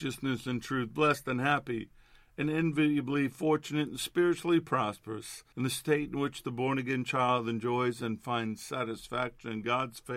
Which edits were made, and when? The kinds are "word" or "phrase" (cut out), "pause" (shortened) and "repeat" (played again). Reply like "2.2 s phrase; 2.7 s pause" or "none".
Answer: 5.5 s pause

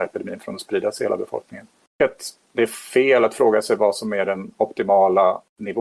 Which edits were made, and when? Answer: none

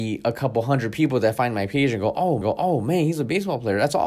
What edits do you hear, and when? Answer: 2.4 s repeat

